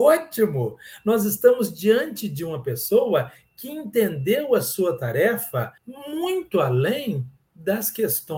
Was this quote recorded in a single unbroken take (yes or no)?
no